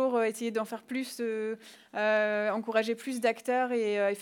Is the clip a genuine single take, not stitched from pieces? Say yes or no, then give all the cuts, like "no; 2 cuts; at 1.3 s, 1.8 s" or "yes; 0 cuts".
yes; 0 cuts